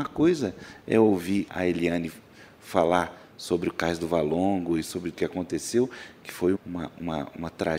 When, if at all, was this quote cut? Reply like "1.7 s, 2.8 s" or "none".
1.5 s, 5.1 s, 6.5 s